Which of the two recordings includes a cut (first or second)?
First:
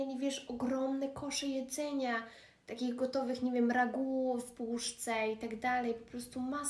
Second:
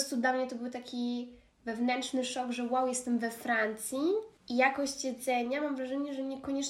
second